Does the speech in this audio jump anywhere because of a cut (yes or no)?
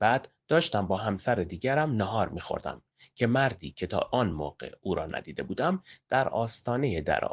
no